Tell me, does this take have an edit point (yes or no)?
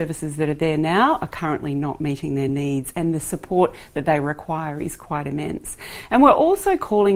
no